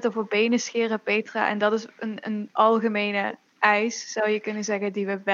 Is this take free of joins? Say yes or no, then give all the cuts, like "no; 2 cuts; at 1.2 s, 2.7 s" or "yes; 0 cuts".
yes; 0 cuts